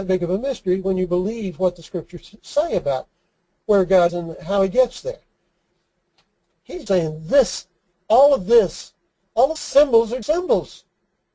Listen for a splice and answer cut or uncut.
cut